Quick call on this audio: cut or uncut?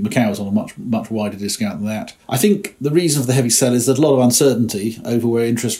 cut